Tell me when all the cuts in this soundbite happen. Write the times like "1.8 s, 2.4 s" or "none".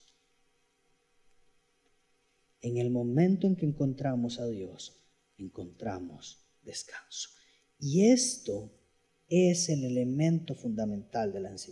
none